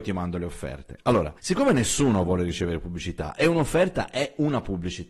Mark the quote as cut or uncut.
cut